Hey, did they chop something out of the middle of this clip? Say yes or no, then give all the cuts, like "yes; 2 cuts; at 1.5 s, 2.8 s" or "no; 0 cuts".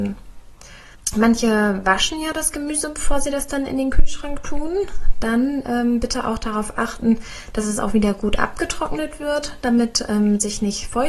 no; 0 cuts